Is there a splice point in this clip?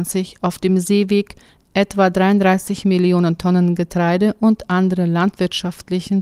no; 0 cuts

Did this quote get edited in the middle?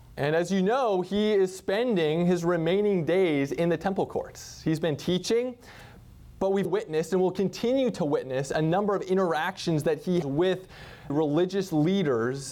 yes; 3 cuts; at 6.6 s, 10.2 s, 11.1 s

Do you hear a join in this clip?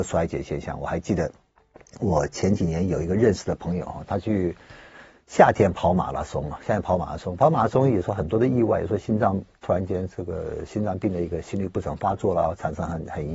no; 0 cuts

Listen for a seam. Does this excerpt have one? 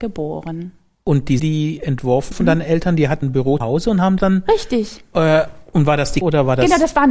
yes; 6 cuts; at 1.4 s, 2.3 s, 3.2 s, 3.6 s, 4.2 s, 6.2 s

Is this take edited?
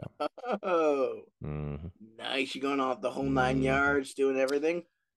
yes; 1 cut; at 1.3 s

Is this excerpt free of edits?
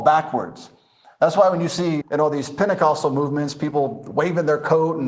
no; 1 cut; at 2.0 s

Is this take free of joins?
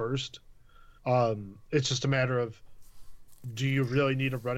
no; 1 cut; at 1.0 s

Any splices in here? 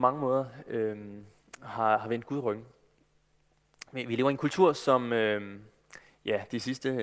no; 0 cuts

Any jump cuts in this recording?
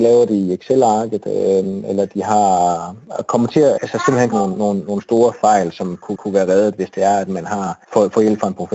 yes; 4 cuts; at 3.8 s, 4.3 s, 6.2 s, 7.8 s

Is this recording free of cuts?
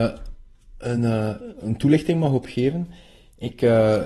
yes; 0 cuts

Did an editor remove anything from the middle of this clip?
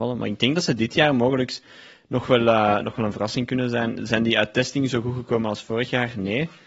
no; 0 cuts

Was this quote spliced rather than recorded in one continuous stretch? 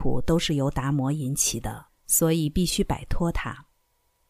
yes; 1 cut; at 1.9 s

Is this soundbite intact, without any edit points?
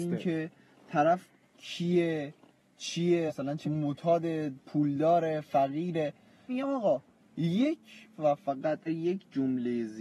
no; 5 cuts; at 3.3 s, 3.6 s, 6.5 s, 8.1 s, 8.9 s

